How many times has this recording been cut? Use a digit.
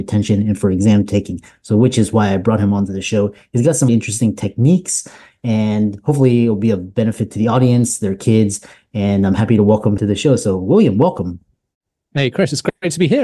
2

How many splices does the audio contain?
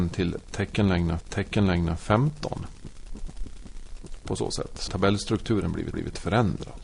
3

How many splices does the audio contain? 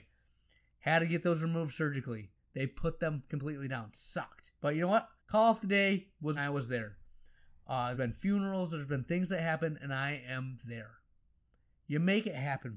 4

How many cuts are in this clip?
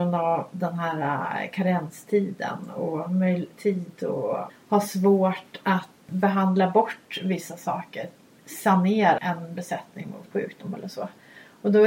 5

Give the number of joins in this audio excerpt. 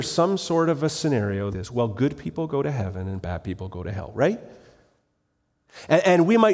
1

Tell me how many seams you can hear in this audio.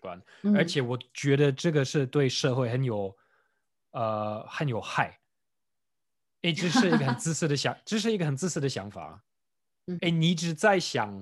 1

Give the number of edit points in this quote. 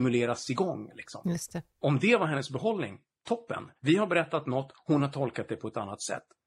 1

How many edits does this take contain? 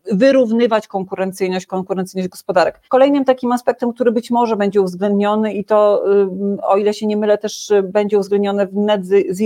2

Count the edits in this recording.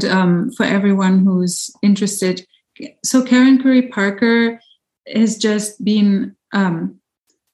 0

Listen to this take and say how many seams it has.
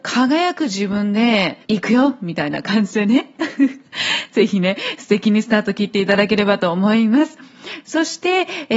1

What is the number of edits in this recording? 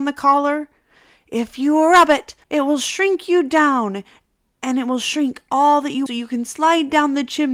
2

